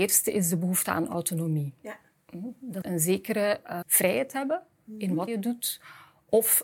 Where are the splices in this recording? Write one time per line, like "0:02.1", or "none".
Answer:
0:02.8
0:03.8
0:05.3

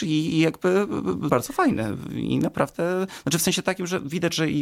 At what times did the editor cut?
0:01.3

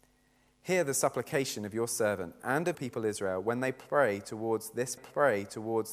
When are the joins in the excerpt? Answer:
0:02.7
0:05.0

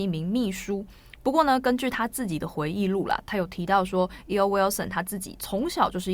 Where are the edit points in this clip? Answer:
none

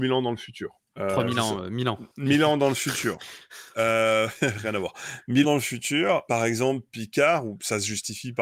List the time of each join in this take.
0:02.1
0:05.4
0:06.3

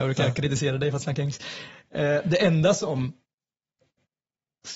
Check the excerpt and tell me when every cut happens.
none

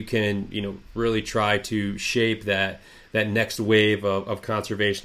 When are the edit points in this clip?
none

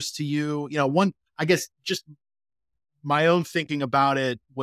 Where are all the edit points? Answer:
none

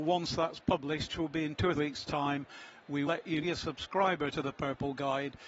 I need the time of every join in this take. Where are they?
0:01.1
0:01.8
0:03.1
0:03.4

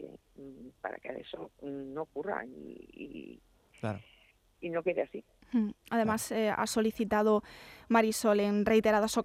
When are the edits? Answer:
none

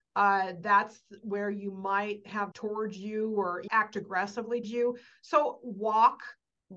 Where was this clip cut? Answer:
0:02.5
0:03.7
0:04.6

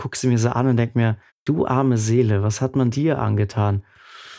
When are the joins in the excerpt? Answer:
0:01.3
0:02.9

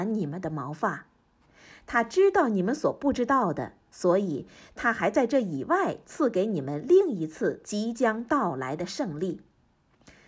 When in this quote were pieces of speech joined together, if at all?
none

